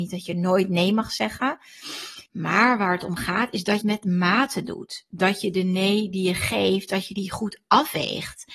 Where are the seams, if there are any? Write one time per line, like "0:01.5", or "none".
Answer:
0:02.3
0:03.8